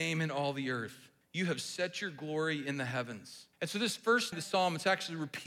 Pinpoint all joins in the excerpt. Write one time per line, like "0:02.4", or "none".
0:01.2
0:03.5
0:04.3